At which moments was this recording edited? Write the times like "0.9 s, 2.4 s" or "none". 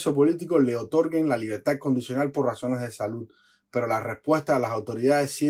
none

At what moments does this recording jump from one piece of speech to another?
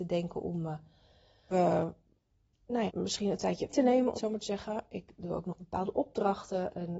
1.5 s, 2.9 s, 3.7 s, 4.2 s

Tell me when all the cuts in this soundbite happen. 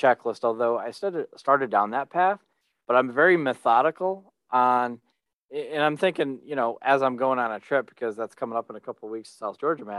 none

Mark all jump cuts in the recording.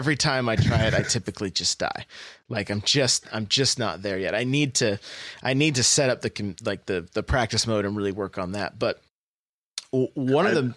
none

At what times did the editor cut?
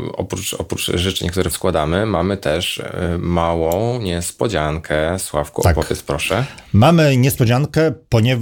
1.5 s

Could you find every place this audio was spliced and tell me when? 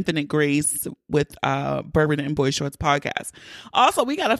none

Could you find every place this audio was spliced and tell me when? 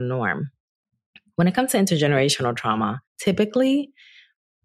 3.1 s

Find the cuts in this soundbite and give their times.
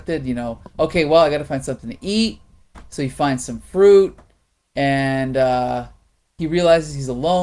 none

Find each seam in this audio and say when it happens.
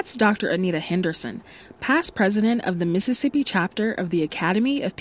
none

